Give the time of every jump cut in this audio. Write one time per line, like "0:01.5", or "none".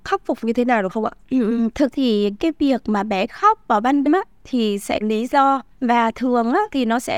0:01.2
0:01.9
0:02.4
0:03.3
0:04.0
0:05.0
0:05.7

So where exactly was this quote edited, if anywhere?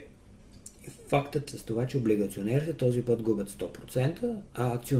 0:01.5

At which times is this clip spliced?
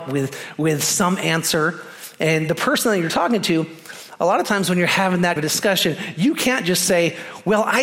0:05.4

